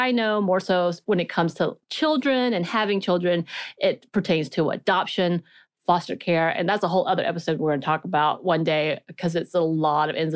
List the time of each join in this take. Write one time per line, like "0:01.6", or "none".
none